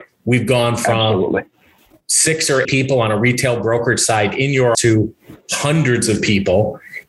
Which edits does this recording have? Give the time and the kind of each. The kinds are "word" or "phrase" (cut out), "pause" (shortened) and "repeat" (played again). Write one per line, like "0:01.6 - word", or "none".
0:02.6 - word
0:04.7 - word